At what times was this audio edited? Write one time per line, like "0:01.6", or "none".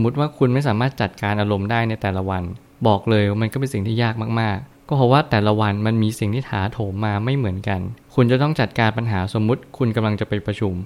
none